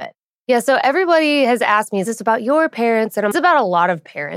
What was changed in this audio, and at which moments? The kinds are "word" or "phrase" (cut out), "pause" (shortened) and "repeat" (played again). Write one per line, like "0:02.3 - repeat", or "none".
0:02.0 - phrase
0:03.3 - phrase